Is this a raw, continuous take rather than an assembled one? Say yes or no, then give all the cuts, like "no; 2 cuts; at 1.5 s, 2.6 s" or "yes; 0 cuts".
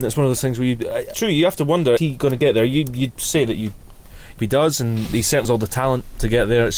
no; 4 cuts; at 1.1 s, 2.0 s, 4.4 s, 5.4 s